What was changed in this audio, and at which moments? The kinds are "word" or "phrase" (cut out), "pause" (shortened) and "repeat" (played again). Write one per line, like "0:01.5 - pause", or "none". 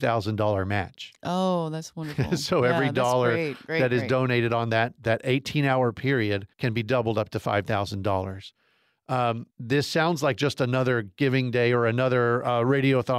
0:06.5 - pause
0:09.5 - pause